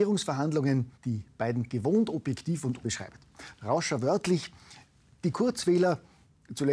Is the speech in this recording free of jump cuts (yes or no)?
no